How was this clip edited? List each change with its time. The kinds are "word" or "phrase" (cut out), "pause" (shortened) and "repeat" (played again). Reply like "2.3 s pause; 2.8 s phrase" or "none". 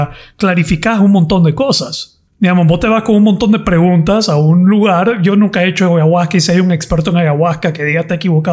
2.3 s pause